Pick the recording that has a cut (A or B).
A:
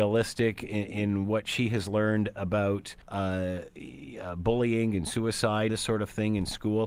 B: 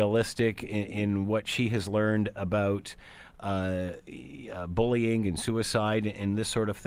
A